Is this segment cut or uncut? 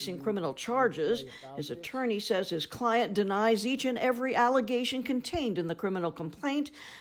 uncut